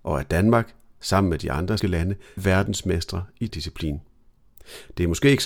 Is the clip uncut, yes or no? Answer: no